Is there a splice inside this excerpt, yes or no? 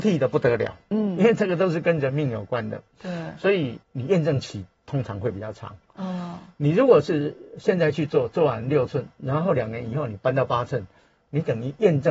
yes